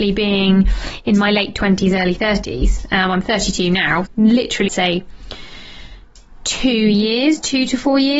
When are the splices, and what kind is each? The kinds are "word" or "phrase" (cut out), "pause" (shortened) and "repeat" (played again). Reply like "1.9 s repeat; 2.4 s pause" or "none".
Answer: 4.1 s word; 4.7 s phrase